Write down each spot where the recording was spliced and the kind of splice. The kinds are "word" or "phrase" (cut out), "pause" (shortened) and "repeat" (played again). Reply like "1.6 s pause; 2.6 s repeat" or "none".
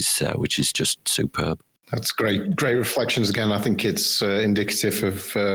none